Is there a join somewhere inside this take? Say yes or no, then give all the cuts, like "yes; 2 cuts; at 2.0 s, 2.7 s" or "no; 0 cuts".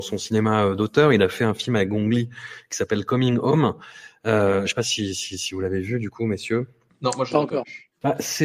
no; 0 cuts